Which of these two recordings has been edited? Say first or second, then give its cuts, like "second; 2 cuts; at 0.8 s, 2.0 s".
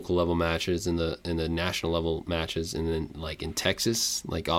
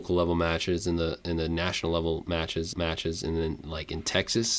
second; 1 cut; at 2.7 s